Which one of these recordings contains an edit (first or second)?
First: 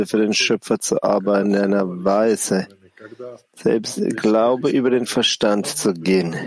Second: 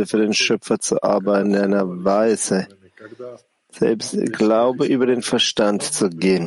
first